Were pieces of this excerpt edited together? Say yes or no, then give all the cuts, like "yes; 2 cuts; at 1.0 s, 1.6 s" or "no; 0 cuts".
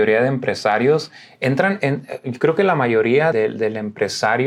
yes; 1 cut; at 3.3 s